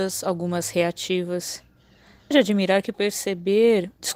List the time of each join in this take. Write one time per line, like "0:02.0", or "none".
0:02.3
0:02.9